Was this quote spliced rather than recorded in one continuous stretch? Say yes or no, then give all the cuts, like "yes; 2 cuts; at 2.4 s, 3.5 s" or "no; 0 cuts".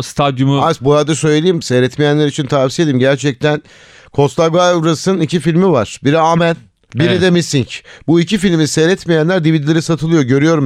no; 0 cuts